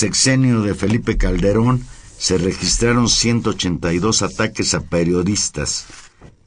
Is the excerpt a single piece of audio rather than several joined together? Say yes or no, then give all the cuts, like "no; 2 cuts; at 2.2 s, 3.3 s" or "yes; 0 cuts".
yes; 0 cuts